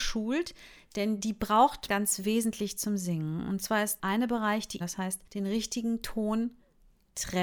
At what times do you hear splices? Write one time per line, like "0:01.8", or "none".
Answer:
0:01.9
0:04.0
0:04.8
0:05.3